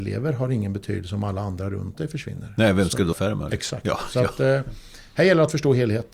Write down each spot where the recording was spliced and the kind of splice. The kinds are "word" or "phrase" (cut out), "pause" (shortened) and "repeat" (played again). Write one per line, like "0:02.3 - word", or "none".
0:03.1 - word